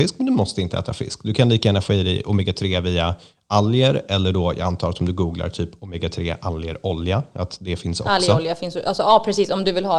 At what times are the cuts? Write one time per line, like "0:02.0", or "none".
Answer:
none